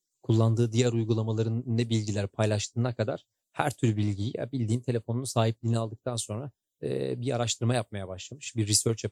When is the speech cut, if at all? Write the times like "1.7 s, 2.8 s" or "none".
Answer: none